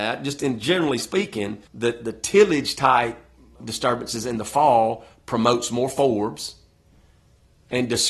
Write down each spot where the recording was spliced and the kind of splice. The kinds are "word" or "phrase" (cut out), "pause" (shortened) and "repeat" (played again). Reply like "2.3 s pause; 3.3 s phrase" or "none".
1.7 s pause; 3.6 s word